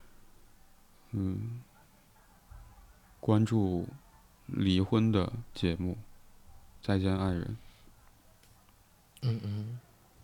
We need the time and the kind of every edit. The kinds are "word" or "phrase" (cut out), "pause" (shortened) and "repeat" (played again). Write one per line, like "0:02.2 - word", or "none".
none